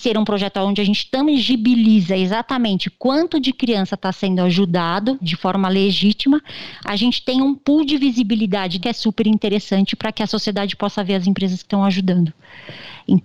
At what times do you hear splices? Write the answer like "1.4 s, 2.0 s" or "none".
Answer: 5.2 s, 8.8 s